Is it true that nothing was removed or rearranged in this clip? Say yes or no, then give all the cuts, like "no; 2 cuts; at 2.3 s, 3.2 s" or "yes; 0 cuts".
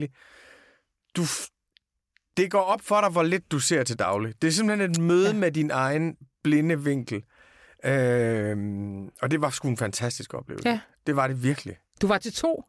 yes; 0 cuts